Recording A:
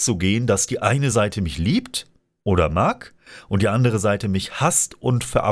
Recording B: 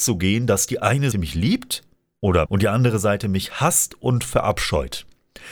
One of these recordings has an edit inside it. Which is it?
B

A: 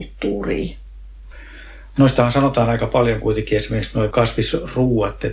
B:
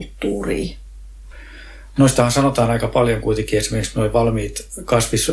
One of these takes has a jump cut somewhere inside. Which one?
A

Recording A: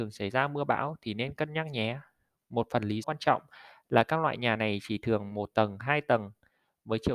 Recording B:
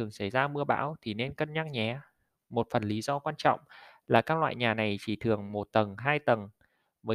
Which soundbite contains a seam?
A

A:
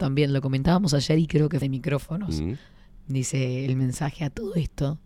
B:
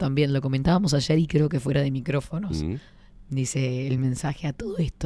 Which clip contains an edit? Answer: A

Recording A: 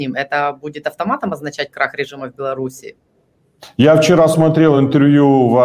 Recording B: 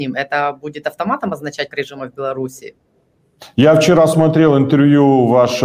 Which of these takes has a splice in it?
B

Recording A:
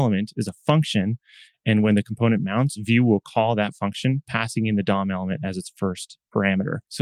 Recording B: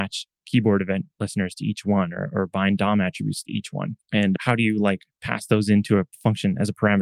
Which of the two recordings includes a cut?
B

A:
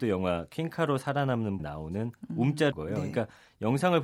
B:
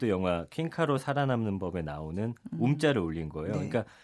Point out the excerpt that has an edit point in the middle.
A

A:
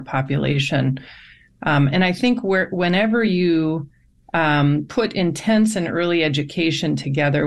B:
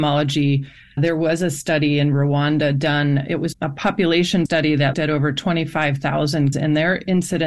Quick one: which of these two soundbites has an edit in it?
B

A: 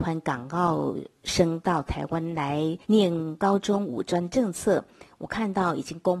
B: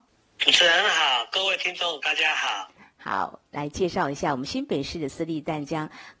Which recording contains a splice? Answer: A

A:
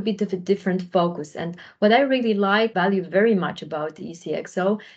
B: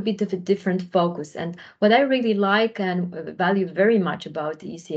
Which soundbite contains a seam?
A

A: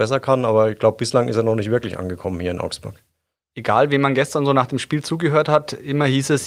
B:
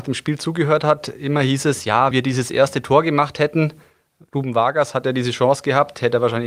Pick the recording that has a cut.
B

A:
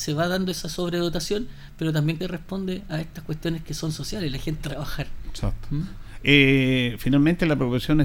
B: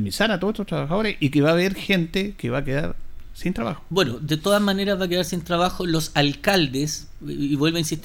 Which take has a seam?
A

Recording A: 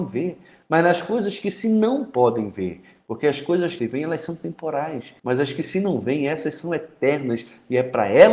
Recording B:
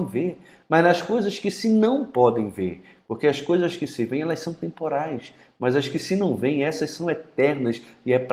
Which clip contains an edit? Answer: A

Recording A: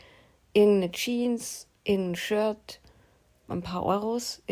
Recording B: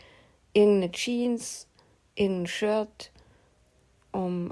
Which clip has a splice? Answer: A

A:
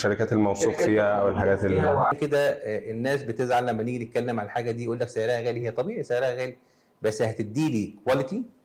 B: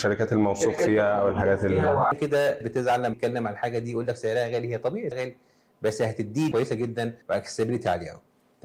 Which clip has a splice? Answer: B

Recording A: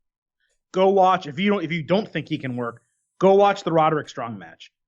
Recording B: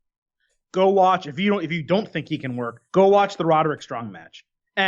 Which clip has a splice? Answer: B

